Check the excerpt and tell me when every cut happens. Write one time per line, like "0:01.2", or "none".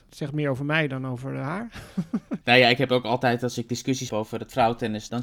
0:04.1